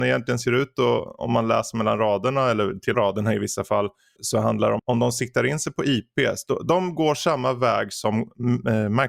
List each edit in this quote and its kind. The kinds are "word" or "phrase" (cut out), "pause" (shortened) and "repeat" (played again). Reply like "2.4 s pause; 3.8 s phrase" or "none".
2.9 s phrase; 4.2 s word; 4.8 s word